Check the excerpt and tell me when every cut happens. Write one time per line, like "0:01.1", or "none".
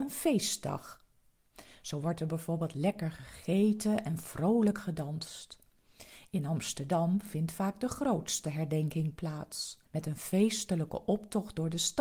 0:09.9